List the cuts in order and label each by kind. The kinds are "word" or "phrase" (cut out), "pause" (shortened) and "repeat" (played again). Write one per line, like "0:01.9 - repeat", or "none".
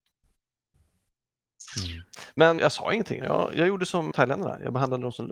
0:02.6 - word
0:03.2 - word
0:04.1 - word